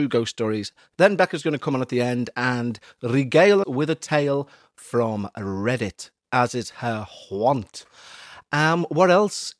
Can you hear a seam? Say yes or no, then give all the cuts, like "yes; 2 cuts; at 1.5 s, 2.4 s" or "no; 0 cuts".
yes; 1 cut; at 3.6 s